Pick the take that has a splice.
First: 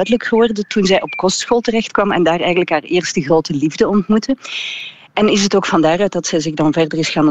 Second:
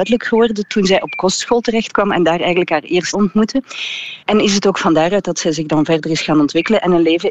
second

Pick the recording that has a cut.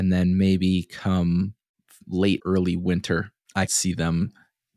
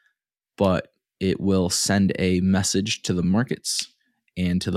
first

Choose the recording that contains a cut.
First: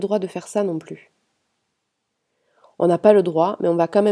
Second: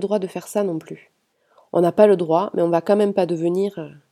second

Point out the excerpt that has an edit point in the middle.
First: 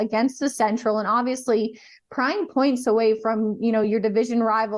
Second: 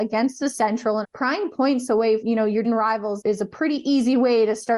second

